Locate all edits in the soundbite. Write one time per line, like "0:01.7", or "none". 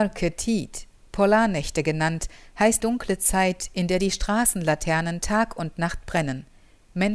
0:02.8